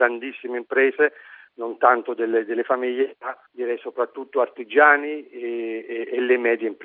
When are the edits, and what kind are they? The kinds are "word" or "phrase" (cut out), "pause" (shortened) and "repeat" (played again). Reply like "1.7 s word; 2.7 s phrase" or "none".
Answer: 3.5 s pause